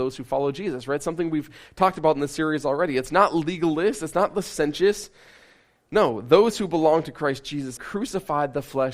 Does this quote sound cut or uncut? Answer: cut